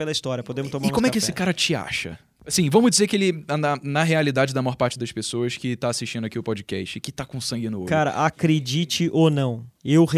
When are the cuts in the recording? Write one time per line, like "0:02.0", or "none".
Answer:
none